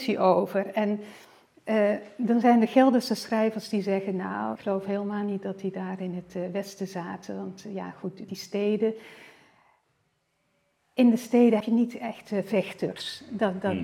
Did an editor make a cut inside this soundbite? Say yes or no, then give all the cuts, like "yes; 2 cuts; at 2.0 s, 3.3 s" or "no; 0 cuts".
yes; 3 cuts; at 4.6 s, 8.2 s, 11.6 s